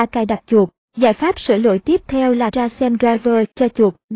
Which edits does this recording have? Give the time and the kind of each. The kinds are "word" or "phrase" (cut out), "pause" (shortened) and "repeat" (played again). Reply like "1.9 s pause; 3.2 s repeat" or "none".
2.5 s word

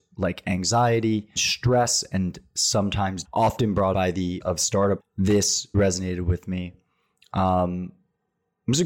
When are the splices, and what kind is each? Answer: 1.4 s word; 3.2 s word; 3.9 s word; 4.4 s word; 5.0 s word; 5.7 s word

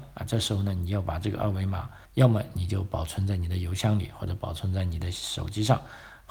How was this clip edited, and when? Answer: 2.0 s pause

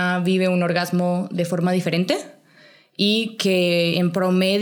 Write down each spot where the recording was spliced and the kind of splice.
none

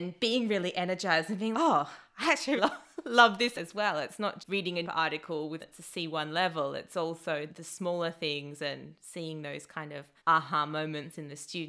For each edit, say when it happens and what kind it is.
1.5 s word; 2.6 s word; 3.5 s phrase; 4.4 s word; 4.8 s word; 5.6 s word; 7.5 s word; 10.2 s pause

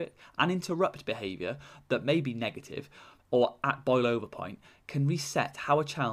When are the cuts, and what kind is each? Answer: none

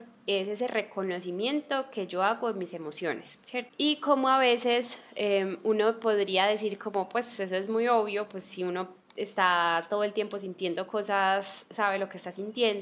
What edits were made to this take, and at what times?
none

